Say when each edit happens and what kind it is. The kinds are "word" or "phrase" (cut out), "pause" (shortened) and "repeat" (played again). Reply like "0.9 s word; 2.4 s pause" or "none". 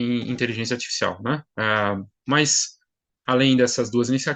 1.5 s pause